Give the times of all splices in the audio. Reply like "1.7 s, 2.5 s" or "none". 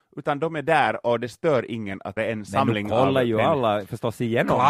2.2 s

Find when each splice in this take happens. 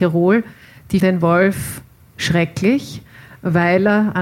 1.0 s

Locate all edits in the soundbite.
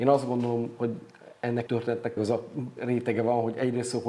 1.7 s, 2.2 s, 2.8 s

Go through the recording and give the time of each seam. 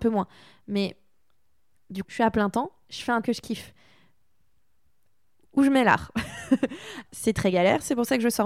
2.0 s, 3.2 s, 7.1 s

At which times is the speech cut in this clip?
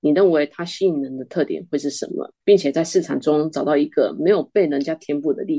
2.4 s

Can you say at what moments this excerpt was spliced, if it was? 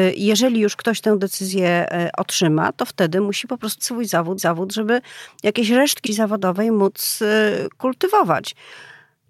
3.8 s, 4.4 s, 6.1 s

